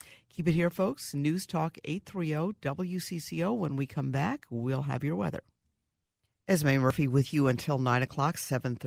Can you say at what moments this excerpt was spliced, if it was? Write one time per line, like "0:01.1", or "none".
none